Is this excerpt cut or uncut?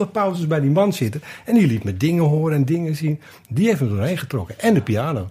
uncut